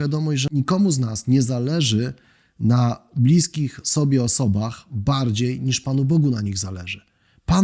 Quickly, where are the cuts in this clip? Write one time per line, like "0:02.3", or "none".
none